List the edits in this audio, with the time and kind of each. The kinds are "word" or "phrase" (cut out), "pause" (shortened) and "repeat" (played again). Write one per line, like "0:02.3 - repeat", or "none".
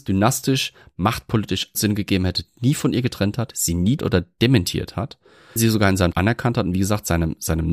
0:01.7 - word
0:04.0 - word
0:05.6 - word
0:06.1 - word